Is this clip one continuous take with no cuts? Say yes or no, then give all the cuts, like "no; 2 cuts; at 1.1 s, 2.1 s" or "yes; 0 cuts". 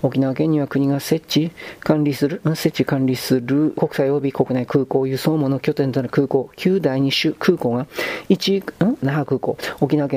no; 2 cuts; at 3.8 s, 9.0 s